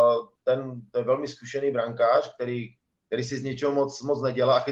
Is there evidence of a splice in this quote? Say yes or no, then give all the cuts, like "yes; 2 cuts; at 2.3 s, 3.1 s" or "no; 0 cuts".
no; 0 cuts